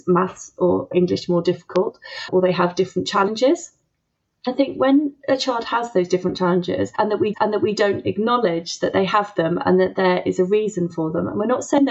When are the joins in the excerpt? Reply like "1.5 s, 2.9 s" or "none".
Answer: 7.3 s